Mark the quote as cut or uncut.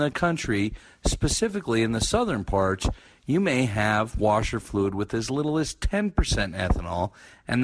uncut